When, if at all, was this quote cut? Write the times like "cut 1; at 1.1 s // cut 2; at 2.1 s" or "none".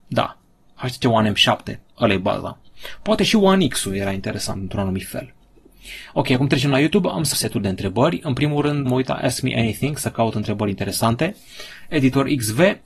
cut 1; at 7.3 s // cut 2; at 8.9 s

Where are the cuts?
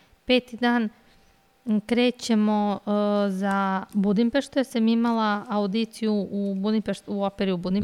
none

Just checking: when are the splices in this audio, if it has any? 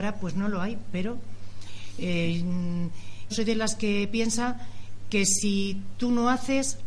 cut 1; at 3.3 s

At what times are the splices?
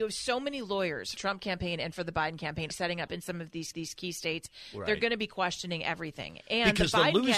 cut 1; at 1.2 s // cut 2; at 2.7 s // cut 3; at 3.1 s // cut 4; at 3.7 s

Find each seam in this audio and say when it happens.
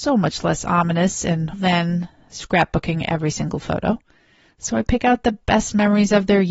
cut 1; at 1.5 s

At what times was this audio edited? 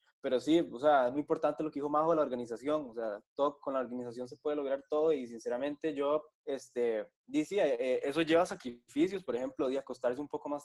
cut 1; at 6.3 s // cut 2; at 8.0 s

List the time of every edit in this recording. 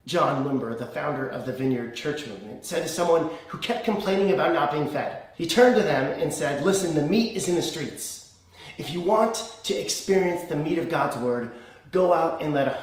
cut 1; at 5.3 s

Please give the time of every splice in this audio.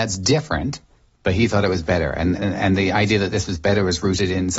cut 1; at 2.4 s

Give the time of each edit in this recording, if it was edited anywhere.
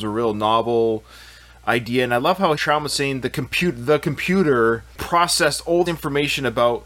cut 1; at 2.6 s // cut 2; at 5.9 s

